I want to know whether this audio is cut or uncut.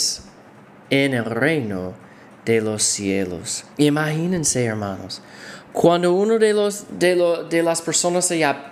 cut